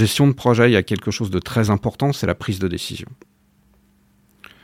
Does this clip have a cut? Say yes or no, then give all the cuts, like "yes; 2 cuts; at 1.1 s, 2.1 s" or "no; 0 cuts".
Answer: no; 0 cuts